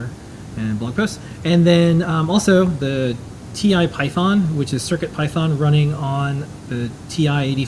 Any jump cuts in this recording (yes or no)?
no